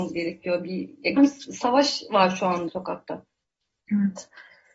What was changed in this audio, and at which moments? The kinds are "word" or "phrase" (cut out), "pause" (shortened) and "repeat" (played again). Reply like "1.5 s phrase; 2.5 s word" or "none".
1.2 s word; 2.7 s word